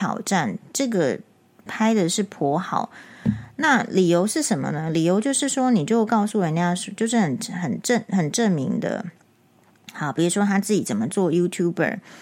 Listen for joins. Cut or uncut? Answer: cut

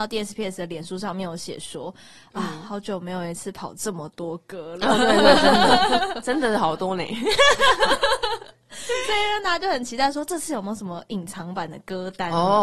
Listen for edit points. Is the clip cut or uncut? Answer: uncut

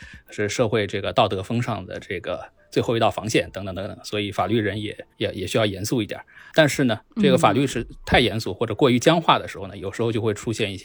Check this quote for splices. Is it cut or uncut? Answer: cut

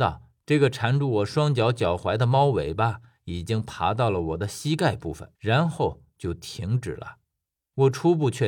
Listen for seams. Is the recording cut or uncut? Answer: cut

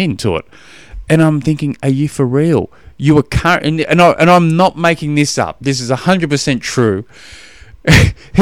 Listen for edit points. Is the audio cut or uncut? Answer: uncut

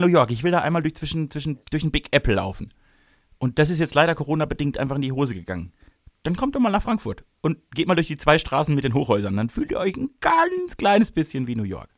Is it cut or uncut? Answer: uncut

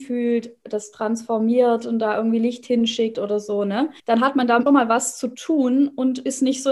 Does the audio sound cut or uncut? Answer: cut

